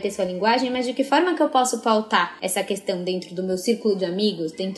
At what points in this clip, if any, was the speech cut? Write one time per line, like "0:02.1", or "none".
none